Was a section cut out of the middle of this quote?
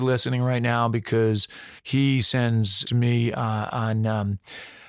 yes; 2 cuts; at 1.8 s, 2.8 s

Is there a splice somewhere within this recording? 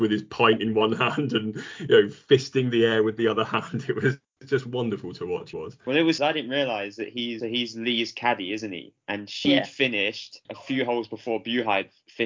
yes; 4 cuts; at 5.5 s, 6.2 s, 7.4 s, 10.4 s

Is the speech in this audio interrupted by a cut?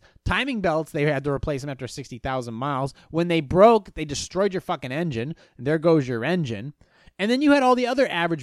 no; 0 cuts

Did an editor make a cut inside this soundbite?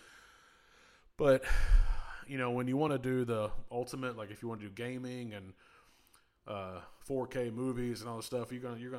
no; 0 cuts

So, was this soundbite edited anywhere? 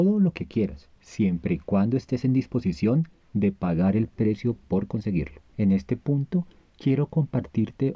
yes; 1 cut; at 5.5 s

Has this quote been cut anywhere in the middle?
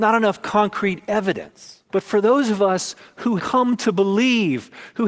yes; 2 cuts; at 1.9 s, 3.4 s

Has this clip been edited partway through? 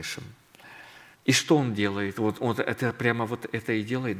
yes; 1 cut; at 1.1 s

